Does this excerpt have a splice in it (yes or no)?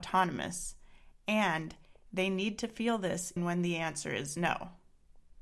yes